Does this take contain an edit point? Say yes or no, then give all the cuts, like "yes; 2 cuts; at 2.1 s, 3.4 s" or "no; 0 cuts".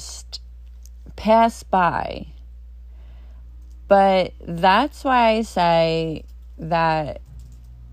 no; 0 cuts